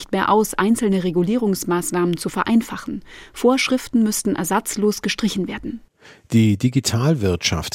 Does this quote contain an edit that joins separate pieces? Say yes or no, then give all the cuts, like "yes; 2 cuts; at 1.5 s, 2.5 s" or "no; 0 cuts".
no; 0 cuts